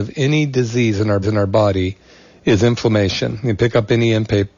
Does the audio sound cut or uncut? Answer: cut